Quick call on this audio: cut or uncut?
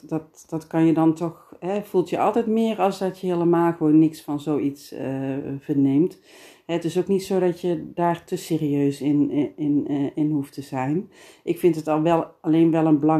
uncut